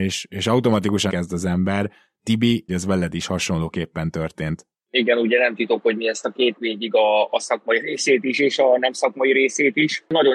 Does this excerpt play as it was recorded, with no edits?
no; 3 cuts; at 1.1 s, 2.7 s, 6.6 s

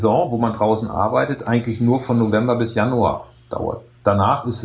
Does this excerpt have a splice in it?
no; 0 cuts

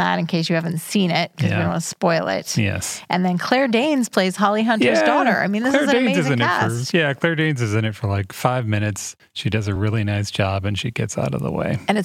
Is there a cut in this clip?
no; 0 cuts

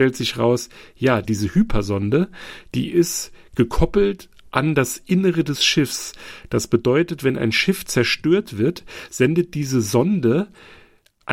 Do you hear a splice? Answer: no; 0 cuts

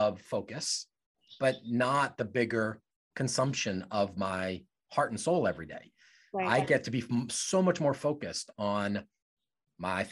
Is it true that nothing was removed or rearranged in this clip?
yes; 0 cuts

